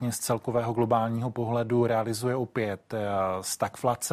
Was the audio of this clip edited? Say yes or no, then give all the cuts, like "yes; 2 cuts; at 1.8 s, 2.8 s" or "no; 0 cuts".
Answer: no; 0 cuts